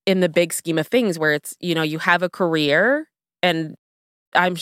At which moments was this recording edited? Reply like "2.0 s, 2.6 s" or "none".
none